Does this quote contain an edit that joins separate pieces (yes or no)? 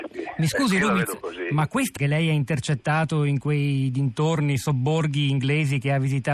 yes